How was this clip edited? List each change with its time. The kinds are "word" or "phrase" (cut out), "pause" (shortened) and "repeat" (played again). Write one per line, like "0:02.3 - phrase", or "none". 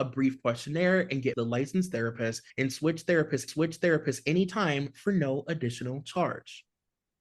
0:01.3 - word
0:02.5 - pause
0:03.5 - repeat